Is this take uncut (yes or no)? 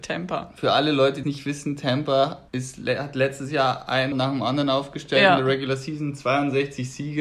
no